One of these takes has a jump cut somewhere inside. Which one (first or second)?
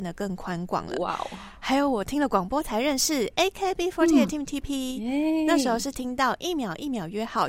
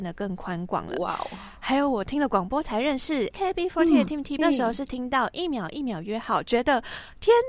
second